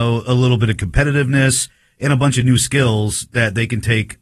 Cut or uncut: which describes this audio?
uncut